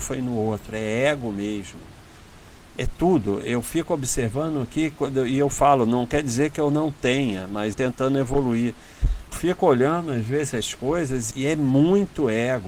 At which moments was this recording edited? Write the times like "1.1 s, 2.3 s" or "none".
7.7 s, 9.3 s, 11.3 s